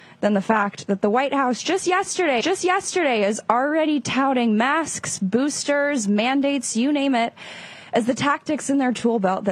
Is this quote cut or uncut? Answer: cut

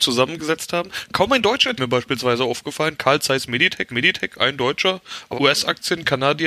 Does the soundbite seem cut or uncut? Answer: cut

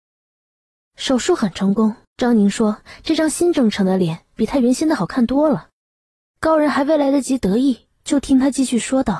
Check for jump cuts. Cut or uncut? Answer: cut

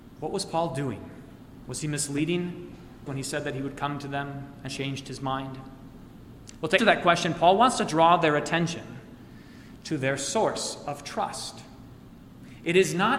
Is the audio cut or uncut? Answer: cut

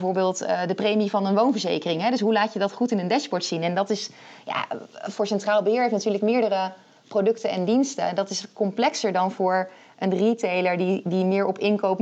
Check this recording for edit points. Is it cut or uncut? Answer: uncut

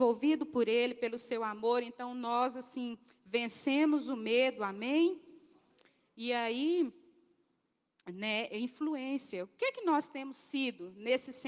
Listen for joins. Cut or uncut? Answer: uncut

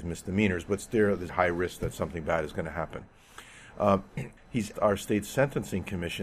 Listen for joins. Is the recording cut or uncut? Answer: cut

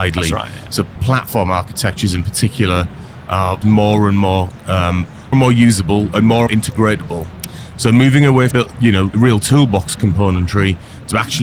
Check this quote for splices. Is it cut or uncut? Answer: cut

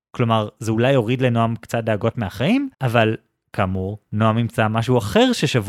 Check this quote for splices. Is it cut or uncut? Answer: cut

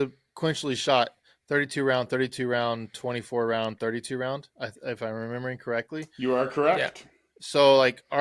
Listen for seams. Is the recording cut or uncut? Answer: uncut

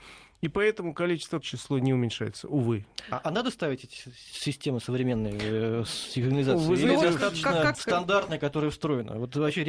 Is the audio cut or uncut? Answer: cut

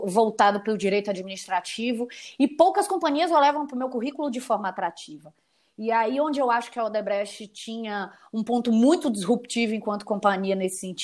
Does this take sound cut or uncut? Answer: uncut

